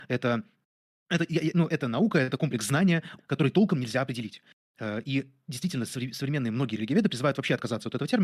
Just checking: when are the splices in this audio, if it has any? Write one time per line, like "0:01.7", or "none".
0:01.7
0:02.4
0:03.2